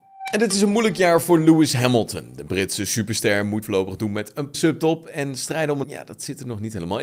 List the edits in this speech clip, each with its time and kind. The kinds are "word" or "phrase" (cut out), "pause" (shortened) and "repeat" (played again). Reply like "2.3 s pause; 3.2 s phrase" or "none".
3.6 s phrase; 4.5 s phrase; 5.8 s word